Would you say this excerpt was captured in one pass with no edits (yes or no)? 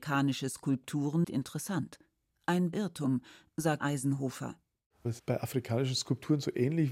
no